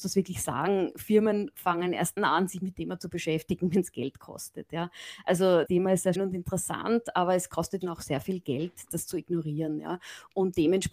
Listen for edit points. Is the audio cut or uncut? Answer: cut